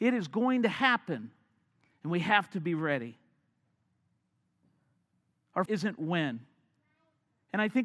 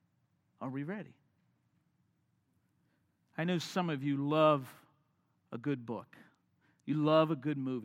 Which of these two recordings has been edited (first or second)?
first